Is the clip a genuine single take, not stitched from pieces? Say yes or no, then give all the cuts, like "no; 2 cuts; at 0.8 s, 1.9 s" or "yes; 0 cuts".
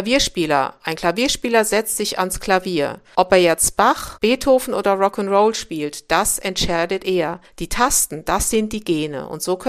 yes; 0 cuts